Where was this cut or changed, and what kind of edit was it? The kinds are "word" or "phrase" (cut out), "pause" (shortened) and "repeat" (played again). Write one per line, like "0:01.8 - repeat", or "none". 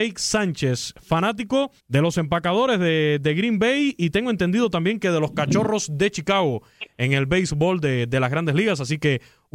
0:01.8 - pause